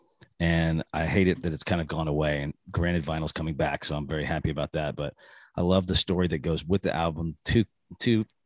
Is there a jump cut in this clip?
no; 0 cuts

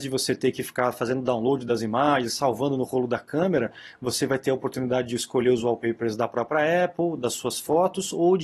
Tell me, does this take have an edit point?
no; 0 cuts

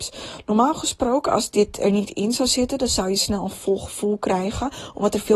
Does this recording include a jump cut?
no; 0 cuts

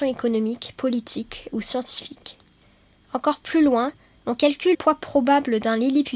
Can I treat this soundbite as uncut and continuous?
no; 1 cut; at 4.7 s

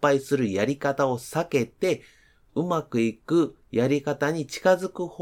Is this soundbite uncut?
yes; 0 cuts

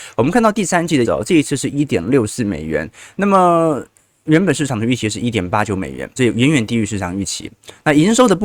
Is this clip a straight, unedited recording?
no; 2 cuts; at 1.0 s, 6.2 s

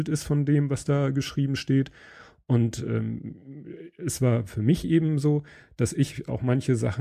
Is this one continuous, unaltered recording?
yes; 0 cuts

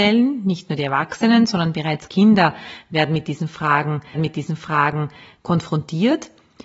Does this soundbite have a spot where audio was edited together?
yes; 1 cut; at 4.1 s

